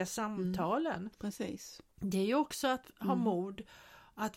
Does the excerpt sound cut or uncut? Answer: cut